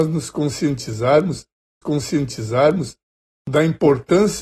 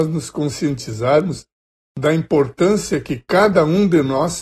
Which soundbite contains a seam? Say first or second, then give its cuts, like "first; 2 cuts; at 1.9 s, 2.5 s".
first; 1 cut; at 1.8 s